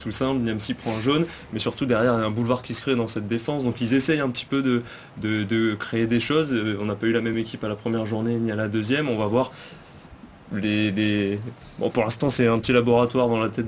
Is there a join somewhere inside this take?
no; 0 cuts

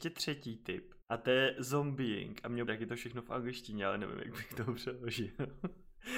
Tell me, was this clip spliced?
yes; 2 cuts; at 1.0 s, 2.7 s

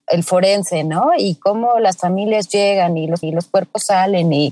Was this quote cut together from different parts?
yes; 1 cut; at 3.2 s

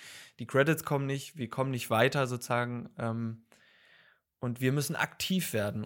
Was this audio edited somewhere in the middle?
no; 0 cuts

